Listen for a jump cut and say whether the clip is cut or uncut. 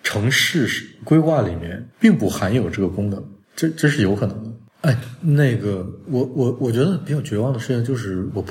cut